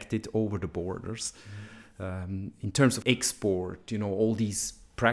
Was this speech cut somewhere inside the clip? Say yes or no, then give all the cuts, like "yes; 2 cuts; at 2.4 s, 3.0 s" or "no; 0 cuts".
yes; 1 cut; at 3.0 s